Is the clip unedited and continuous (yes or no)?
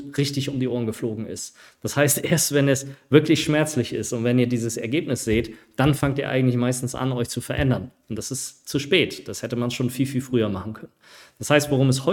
yes